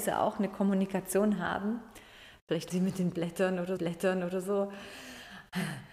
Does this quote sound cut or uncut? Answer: cut